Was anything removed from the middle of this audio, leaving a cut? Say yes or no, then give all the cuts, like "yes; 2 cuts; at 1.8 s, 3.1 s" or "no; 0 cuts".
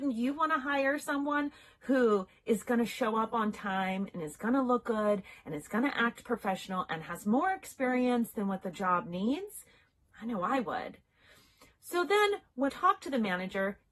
yes; 1 cut; at 12.7 s